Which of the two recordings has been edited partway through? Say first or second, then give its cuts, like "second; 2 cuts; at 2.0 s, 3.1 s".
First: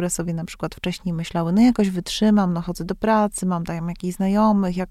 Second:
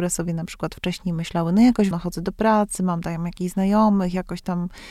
second; 1 cut; at 1.9 s